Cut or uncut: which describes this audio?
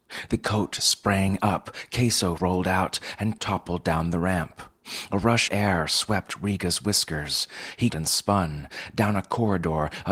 cut